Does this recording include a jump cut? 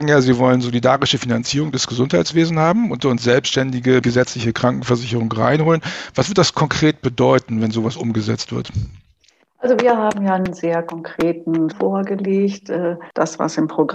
yes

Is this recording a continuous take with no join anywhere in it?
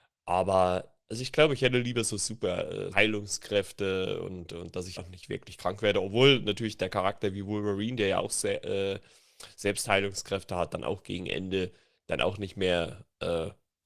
no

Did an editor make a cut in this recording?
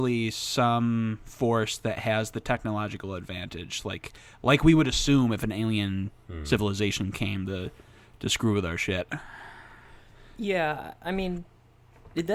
no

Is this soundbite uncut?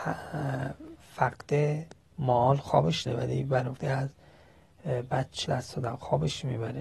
no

